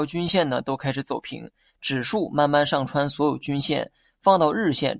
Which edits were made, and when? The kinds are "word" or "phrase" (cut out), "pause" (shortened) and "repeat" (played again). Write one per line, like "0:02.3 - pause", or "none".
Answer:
none

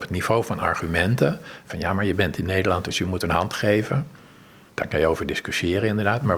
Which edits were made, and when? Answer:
none

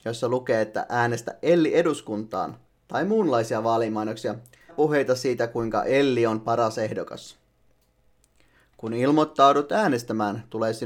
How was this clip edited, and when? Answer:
0:04.7 - phrase

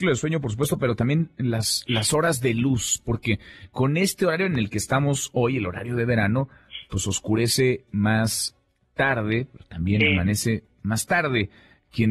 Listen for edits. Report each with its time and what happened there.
none

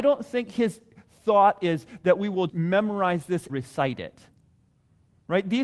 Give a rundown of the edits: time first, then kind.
0:02.5 - word
0:03.5 - word

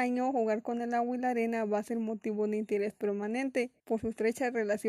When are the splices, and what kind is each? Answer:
0:03.8 - pause

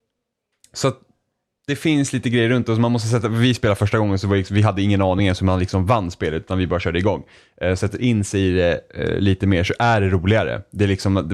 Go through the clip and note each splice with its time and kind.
none

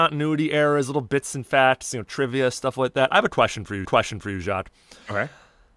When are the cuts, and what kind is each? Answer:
0:03.8 - repeat

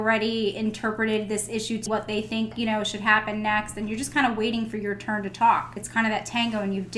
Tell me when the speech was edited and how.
0:01.9 - word

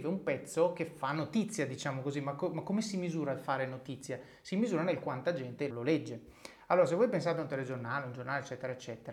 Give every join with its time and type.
0:05.7 - word

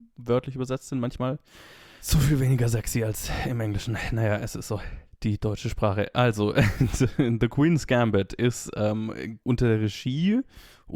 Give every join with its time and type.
none

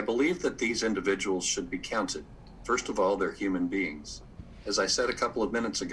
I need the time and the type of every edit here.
none

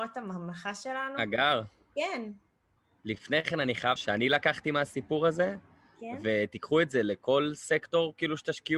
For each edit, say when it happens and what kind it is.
0:02.8 - pause
0:04.0 - phrase

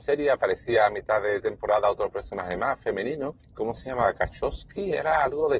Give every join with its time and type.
0:03.4 - pause

